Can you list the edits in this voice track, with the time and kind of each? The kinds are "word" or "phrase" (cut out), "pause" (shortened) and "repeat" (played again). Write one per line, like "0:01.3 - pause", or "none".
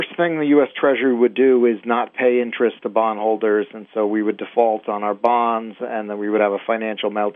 none